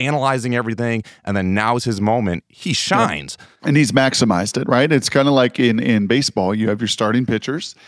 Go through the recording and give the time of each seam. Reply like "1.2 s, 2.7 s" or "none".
3.6 s